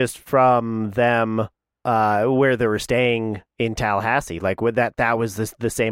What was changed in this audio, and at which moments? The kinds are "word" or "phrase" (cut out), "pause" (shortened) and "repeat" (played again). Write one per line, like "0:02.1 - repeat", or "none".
none